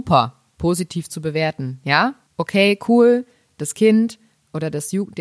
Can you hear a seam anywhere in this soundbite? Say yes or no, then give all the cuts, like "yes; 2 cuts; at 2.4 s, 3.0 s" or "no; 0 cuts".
no; 0 cuts